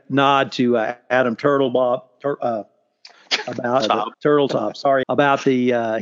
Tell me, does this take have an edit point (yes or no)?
yes